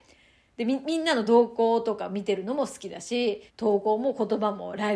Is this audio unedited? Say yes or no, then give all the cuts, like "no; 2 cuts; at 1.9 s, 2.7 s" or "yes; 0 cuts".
no; 1 cut; at 3.5 s